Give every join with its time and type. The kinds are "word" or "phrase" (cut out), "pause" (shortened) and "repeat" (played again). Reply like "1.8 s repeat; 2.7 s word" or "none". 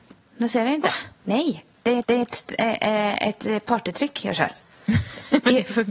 1.1 s pause; 2.0 s repeat; 4.6 s pause